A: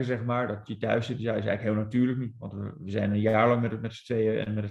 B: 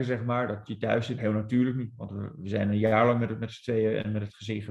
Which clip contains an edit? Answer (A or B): B